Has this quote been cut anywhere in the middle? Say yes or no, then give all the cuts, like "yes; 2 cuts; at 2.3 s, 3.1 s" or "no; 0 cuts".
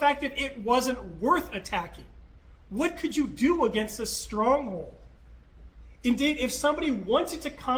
no; 0 cuts